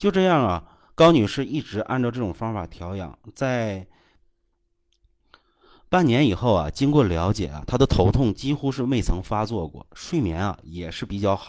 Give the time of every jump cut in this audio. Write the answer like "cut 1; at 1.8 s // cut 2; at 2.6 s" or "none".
none